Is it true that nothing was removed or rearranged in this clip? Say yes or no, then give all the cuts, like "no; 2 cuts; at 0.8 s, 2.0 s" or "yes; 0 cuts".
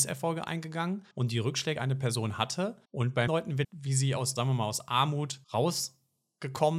no; 7 cuts; at 1.1 s, 1.8 s, 2.8 s, 3.3 s, 3.6 s, 4.4 s, 5.4 s